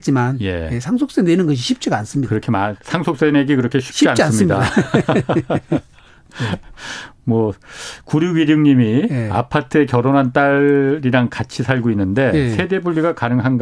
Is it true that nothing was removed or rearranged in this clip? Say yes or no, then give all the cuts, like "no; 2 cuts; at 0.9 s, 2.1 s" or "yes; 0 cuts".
yes; 0 cuts